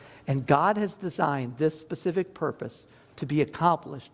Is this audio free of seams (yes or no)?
yes